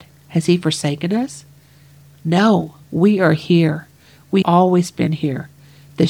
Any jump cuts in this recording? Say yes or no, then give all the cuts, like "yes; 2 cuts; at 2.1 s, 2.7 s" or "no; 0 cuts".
yes; 2 cuts; at 2.8 s, 4.4 s